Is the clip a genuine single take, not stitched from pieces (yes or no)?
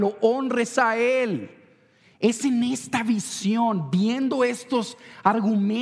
yes